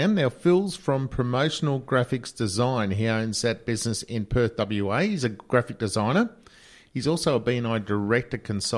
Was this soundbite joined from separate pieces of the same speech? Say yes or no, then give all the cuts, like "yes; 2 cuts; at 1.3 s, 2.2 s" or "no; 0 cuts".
no; 0 cuts